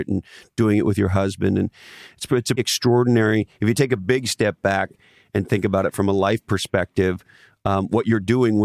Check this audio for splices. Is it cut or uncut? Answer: cut